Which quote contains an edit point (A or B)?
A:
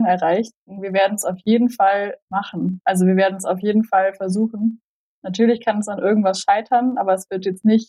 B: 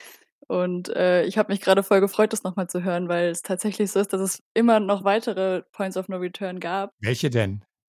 A